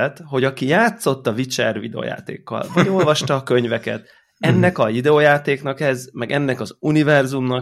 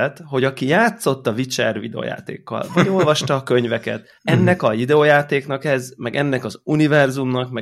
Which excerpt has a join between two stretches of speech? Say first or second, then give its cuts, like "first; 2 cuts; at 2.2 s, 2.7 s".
second; 1 cut; at 4.2 s